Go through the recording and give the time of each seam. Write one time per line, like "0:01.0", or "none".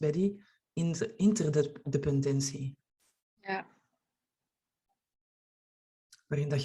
none